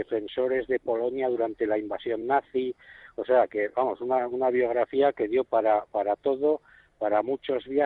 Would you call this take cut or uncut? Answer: uncut